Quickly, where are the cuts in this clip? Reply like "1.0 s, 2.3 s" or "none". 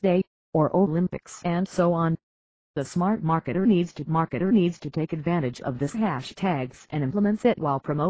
4.1 s